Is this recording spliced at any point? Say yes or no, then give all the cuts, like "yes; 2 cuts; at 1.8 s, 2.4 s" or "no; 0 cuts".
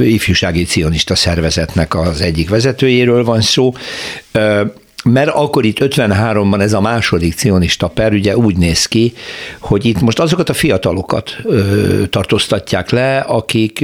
no; 0 cuts